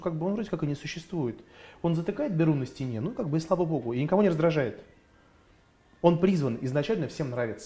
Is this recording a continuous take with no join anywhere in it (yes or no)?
yes